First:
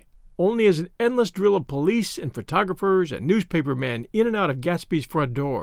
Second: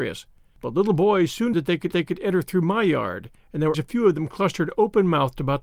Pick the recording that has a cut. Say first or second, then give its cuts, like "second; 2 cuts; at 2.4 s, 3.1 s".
second; 3 cuts; at 1.5 s, 1.9 s, 3.7 s